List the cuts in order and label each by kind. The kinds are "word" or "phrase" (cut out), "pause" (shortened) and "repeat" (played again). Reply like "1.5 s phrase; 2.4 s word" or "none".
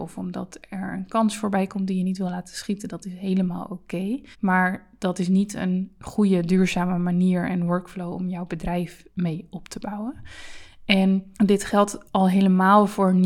4.3 s pause; 9.1 s pause; 11.3 s pause; 12.1 s pause

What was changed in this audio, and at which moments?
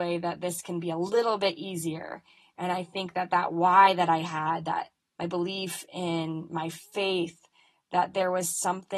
none

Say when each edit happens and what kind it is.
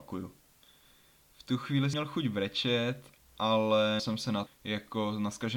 1.9 s word; 4.0 s word; 4.5 s word

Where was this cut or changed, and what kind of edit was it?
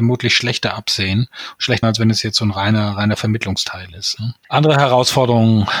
1.8 s word; 4.4 s pause

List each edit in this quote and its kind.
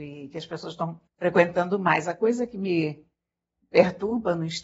1.1 s pause

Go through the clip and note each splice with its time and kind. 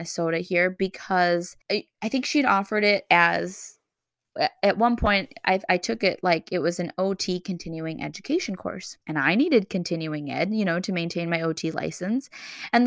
1.6 s pause; 9.0 s pause

